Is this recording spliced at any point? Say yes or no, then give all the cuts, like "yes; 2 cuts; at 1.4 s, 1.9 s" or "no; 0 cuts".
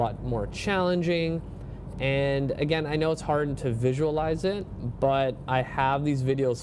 no; 0 cuts